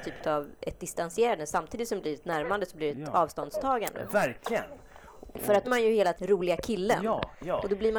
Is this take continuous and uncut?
no; 2 cuts; at 5.6 s, 6.2 s

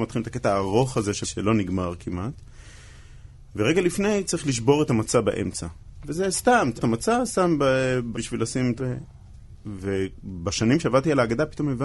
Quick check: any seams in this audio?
yes; 4 cuts; at 1.2 s, 6.8 s, 8.1 s, 8.8 s

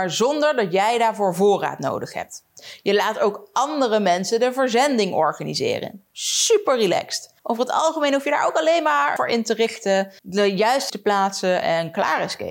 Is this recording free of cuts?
no; 5 cuts; at 6.1 s, 7.4 s, 9.2 s, 10.2 s, 10.9 s

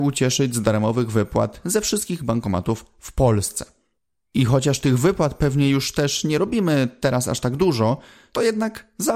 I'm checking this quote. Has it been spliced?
no; 0 cuts

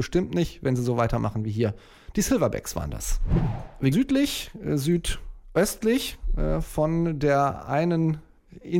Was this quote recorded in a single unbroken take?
no; 1 cut; at 3.9 s

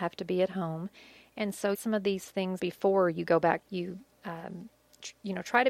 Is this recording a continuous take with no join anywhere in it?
no; 3 cuts; at 1.7 s, 2.6 s, 3.6 s

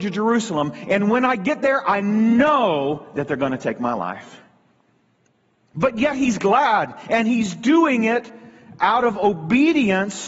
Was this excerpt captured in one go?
yes; 0 cuts

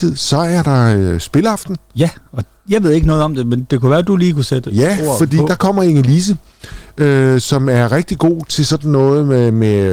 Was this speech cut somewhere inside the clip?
no; 0 cuts

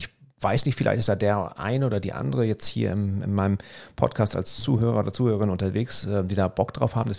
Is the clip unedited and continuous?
yes; 0 cuts

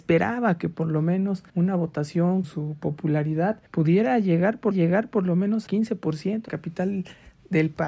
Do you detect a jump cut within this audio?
yes; 6 cuts; at 1.5 s, 2.4 s, 3.7 s, 4.7 s, 5.7 s, 6.5 s

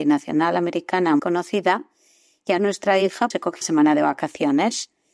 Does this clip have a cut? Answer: yes; 4 cuts; at 1.2 s, 2.6 s, 3.3 s, 3.6 s

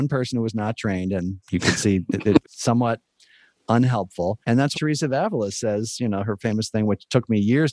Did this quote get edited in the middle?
yes; 4 cuts; at 1.4 s, 2.4 s, 4.4 s, 4.7 s

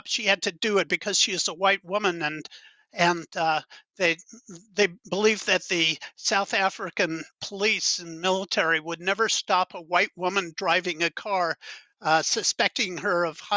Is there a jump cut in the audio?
no; 0 cuts

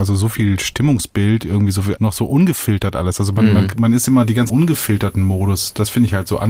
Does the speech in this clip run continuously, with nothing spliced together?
no; 2 cuts; at 2.0 s, 4.5 s

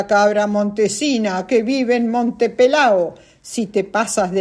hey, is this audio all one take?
yes; 0 cuts

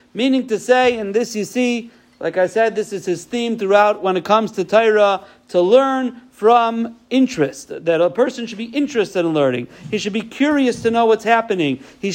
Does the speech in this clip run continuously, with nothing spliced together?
yes; 0 cuts

